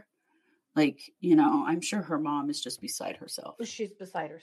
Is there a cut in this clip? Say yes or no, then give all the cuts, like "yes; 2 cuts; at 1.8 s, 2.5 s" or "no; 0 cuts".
no; 0 cuts